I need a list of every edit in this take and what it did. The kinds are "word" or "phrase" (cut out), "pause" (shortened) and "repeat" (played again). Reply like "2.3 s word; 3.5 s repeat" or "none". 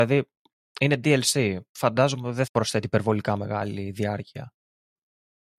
2.5 s word